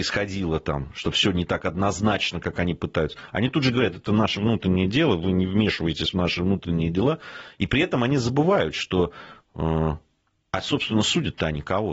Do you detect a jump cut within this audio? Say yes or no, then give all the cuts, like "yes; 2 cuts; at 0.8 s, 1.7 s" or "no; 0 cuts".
no; 0 cuts